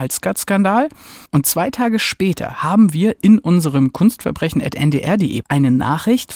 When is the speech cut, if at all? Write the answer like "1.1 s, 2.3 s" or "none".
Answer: 1.3 s, 5.4 s